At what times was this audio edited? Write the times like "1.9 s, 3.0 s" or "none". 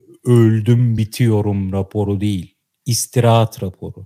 none